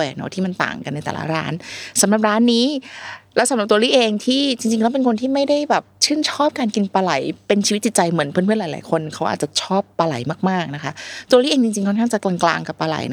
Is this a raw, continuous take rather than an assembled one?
no; 1 cut; at 5.9 s

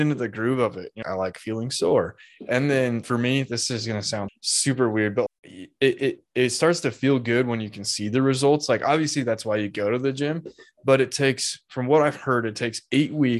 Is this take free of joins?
no; 4 cuts; at 1.0 s, 3.0 s, 4.3 s, 5.3 s

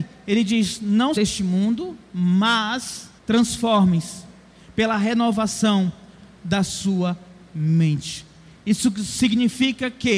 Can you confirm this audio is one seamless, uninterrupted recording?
no; 2 cuts; at 1.2 s, 3.2 s

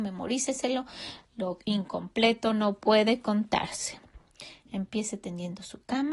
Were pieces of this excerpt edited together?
no; 0 cuts

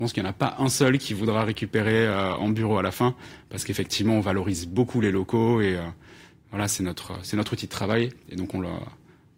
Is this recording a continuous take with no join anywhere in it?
yes; 0 cuts

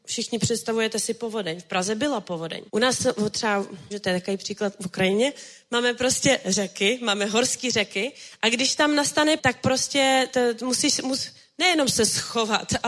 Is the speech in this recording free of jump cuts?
no; 3 cuts; at 2.7 s, 3.9 s, 9.4 s

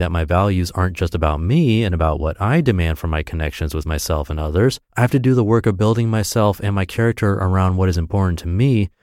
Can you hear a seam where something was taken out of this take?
yes; 1 cut; at 4.9 s

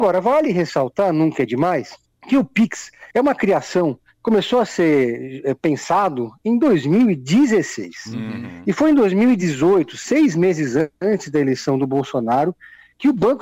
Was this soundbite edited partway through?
yes; 3 cuts; at 2.0 s, 3.1 s, 10.9 s

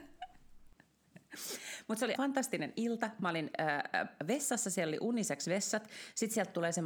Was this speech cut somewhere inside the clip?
yes; 1 cut; at 2.1 s

